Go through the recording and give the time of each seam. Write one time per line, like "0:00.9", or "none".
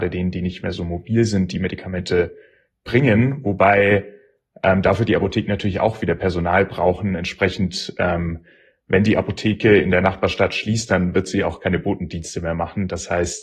none